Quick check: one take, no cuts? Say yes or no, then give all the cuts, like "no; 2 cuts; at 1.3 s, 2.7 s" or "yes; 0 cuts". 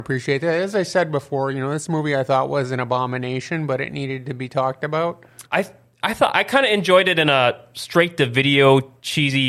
no; 1 cut; at 5.5 s